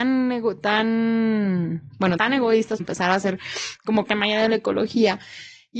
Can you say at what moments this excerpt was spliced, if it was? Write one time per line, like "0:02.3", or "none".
0:02.2
0:02.8
0:04.0